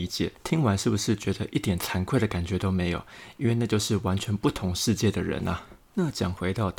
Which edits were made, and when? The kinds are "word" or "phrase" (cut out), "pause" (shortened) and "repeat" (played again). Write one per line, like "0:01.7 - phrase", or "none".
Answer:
0:05.9 - pause